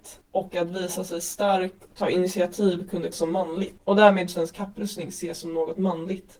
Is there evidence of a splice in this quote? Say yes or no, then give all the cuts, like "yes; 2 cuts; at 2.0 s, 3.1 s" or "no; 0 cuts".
yes; 3 cuts; at 1.9 s, 3.1 s, 4.3 s